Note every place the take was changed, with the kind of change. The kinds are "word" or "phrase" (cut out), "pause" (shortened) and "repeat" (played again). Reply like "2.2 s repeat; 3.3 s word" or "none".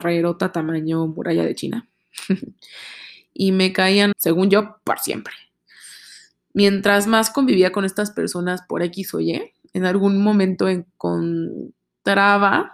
4.1 s word

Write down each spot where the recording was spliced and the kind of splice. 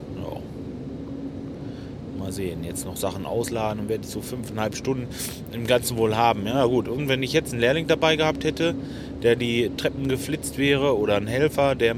none

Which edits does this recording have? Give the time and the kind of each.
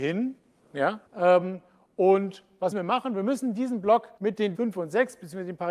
1.1 s pause; 2.7 s word; 4.2 s pause; 4.5 s word

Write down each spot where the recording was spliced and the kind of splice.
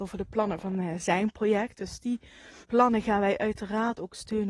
2.6 s pause

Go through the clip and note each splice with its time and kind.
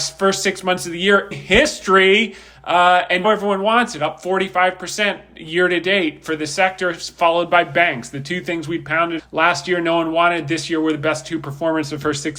1.3 s word; 3.2 s word; 9.2 s word

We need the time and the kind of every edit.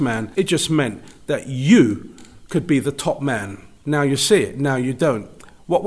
none

